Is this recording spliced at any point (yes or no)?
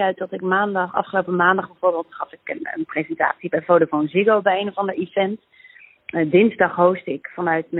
no